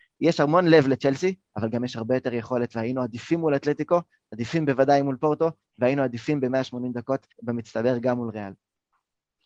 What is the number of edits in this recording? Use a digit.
1